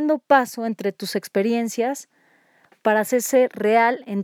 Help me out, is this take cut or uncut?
uncut